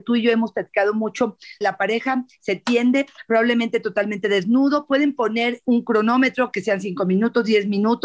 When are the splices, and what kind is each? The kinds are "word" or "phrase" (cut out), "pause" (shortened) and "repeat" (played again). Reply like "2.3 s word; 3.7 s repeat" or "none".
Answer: 1.6 s phrase